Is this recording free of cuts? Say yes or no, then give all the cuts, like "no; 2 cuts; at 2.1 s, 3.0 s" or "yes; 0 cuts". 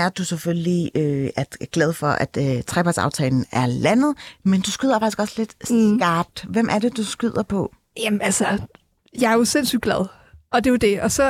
yes; 0 cuts